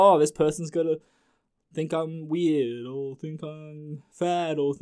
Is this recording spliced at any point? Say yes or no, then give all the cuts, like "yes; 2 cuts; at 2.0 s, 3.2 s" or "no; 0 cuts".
no; 0 cuts